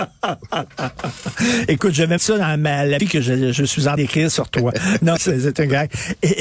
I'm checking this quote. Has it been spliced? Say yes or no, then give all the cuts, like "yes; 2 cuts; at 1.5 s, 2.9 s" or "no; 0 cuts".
yes; 4 cuts; at 2.2 s, 3.0 s, 4.0 s, 5.2 s